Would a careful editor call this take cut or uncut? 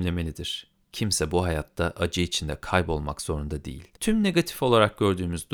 cut